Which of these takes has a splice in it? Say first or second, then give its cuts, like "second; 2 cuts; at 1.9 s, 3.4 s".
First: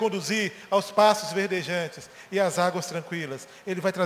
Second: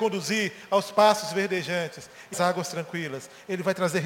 second; 1 cut; at 2.3 s